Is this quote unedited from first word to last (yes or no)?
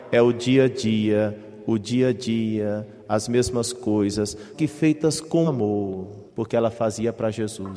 no